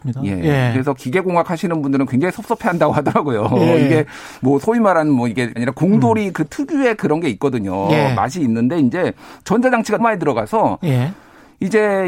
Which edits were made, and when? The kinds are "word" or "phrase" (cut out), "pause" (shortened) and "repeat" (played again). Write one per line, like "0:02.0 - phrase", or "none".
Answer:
0:05.6 - phrase
0:10.0 - word